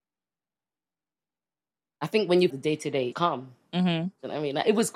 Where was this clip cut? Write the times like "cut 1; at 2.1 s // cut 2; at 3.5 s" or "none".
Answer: cut 1; at 2.5 s // cut 2; at 3.1 s